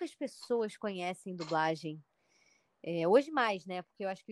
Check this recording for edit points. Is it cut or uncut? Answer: uncut